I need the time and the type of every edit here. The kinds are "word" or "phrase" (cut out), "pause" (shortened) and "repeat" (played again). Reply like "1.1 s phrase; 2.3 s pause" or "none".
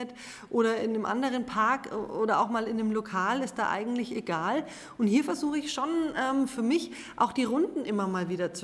none